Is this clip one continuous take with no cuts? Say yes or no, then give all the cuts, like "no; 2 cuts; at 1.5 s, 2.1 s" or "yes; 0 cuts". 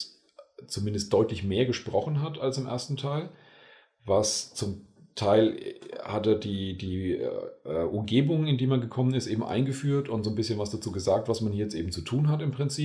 yes; 0 cuts